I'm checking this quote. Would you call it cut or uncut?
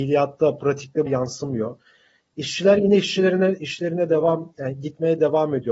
cut